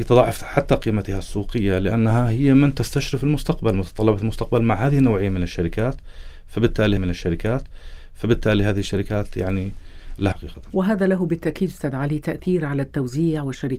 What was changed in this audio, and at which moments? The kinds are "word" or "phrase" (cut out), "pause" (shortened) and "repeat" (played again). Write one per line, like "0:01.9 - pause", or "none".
0:07.0 - repeat
0:10.3 - word